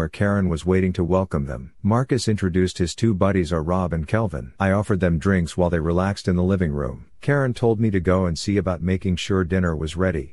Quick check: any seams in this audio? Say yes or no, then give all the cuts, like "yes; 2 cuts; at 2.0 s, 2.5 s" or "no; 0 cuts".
yes; 3 cuts; at 1.8 s, 4.6 s, 7.1 s